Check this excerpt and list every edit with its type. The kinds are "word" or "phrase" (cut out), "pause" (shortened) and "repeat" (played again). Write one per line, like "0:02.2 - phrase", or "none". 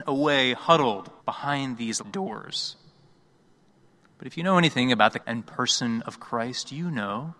0:01.2 - pause
0:02.0 - word
0:05.2 - word